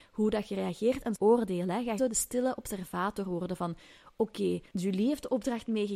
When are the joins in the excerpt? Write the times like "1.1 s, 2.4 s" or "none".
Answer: 1.1 s, 2.0 s, 4.7 s